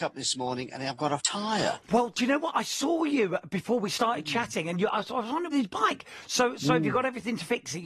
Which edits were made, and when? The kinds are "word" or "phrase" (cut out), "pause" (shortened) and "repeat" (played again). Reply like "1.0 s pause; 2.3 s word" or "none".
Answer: 1.2 s word; 5.5 s phrase